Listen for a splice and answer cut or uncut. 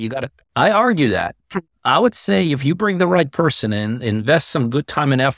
uncut